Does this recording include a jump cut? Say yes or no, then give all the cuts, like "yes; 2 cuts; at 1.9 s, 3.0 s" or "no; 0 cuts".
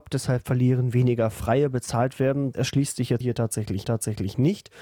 yes; 3 cuts; at 2.5 s, 3.2 s, 3.8 s